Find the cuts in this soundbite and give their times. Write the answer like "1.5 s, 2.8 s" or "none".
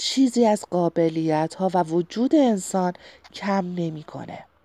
none

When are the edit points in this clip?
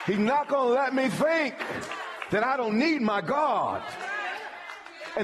none

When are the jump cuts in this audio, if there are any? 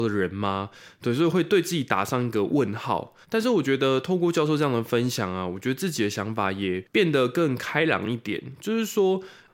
3.2 s

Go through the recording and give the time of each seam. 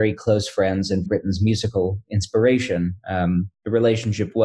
1.1 s, 3.5 s

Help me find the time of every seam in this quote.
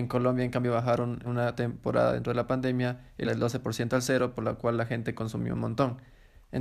1.2 s, 3.2 s

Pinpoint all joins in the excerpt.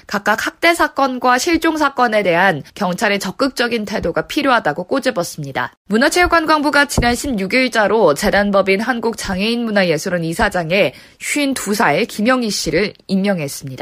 2.7 s, 5.8 s

